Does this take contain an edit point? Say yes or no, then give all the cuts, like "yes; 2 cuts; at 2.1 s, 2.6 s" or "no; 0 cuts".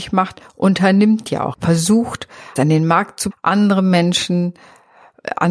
yes; 3 cuts; at 1.5 s, 2.6 s, 3.3 s